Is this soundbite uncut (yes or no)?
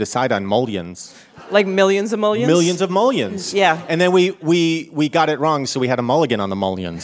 yes